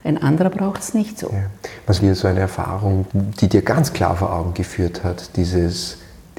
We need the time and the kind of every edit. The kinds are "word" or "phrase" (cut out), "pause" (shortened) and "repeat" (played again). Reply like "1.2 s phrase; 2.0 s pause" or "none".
2.0 s phrase; 3.1 s word